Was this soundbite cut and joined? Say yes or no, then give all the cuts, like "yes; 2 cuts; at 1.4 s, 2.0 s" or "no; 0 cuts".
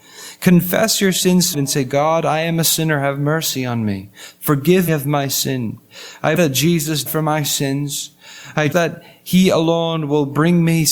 yes; 5 cuts; at 1.5 s, 4.9 s, 6.4 s, 7.1 s, 8.7 s